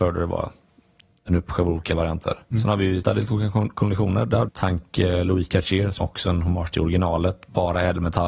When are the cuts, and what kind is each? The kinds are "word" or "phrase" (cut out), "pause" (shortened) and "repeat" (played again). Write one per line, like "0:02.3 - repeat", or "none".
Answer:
0:03.0 - phrase
0:04.5 - word
0:06.0 - phrase